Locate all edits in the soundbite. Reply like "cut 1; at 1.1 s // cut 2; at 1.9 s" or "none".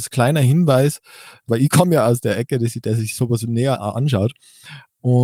none